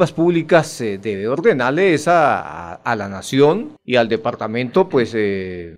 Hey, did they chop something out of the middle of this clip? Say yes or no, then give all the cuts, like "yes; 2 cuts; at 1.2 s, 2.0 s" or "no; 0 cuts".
no; 0 cuts